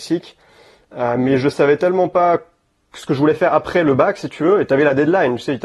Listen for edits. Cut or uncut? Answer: uncut